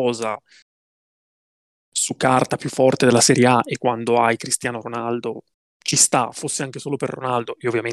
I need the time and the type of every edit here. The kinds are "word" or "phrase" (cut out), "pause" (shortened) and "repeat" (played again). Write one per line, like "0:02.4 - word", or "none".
0:05.5 - pause